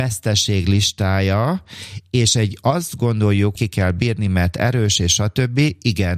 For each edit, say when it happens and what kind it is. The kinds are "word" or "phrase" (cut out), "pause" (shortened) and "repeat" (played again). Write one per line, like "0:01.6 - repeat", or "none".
0:03.6 - phrase